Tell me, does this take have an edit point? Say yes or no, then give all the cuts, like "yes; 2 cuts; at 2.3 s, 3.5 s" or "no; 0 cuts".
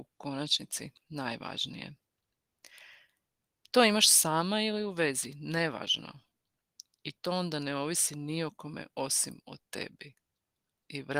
no; 0 cuts